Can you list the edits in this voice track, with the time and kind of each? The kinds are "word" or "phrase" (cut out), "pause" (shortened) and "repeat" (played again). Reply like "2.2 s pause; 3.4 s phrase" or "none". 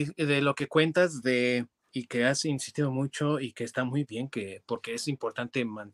none

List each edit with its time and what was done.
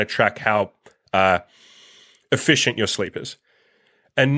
none

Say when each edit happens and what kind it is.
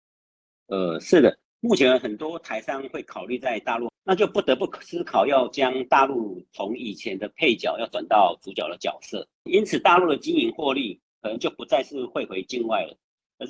3.9 s word; 9.5 s word

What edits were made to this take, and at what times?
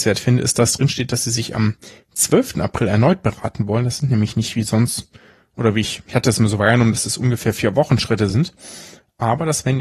none

